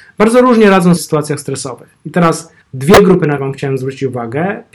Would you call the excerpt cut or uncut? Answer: cut